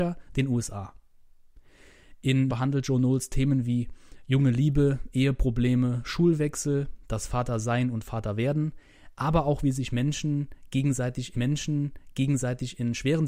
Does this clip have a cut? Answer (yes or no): yes